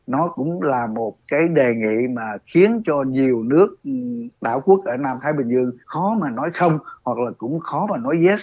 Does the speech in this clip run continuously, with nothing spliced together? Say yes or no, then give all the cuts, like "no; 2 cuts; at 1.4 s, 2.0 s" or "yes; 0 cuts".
no; 1 cut; at 5.8 s